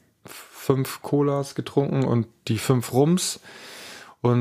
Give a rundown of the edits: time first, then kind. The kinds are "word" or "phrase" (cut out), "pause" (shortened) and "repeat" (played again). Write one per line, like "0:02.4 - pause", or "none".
none

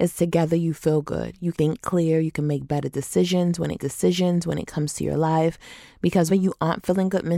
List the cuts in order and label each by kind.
0:01.5 - word
0:03.8 - repeat
0:06.3 - word

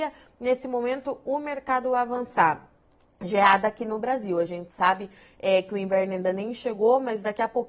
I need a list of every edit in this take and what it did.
none

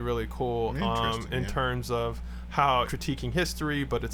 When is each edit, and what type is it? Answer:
0:02.9 - word

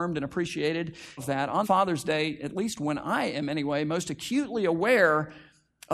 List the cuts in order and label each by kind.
0:01.2 - phrase
0:01.6 - word

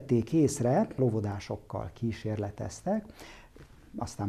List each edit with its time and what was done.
0:01.0 - word

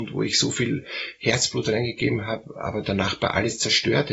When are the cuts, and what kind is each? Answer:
none

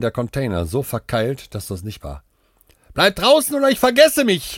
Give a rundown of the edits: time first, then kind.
0:02.0 - word

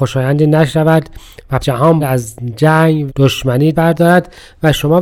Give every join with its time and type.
0:01.6 - word
0:02.0 - word
0:03.1 - word
0:03.7 - word

